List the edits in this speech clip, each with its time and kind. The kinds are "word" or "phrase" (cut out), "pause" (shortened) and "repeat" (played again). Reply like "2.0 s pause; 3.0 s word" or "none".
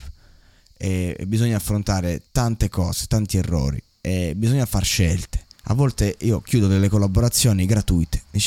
2.3 s pause; 5.5 s pause

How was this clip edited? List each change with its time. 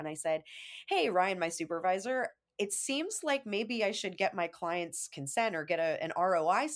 none

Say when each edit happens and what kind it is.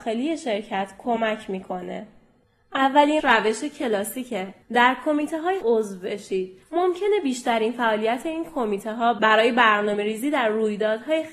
3.2 s word; 4.6 s pause; 5.6 s phrase; 6.6 s pause

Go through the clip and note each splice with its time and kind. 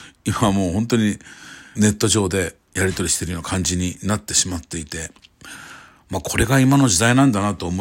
1.7 s phrase; 2.7 s phrase

